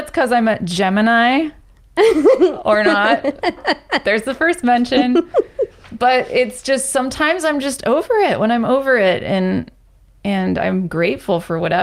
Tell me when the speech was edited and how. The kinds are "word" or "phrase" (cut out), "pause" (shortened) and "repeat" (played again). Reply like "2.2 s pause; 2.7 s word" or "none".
none